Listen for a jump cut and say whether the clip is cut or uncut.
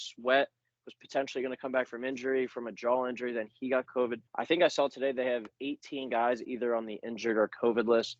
cut